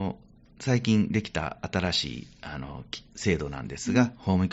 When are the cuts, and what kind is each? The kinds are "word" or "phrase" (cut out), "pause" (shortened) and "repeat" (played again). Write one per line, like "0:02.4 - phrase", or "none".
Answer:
0:03.1 - pause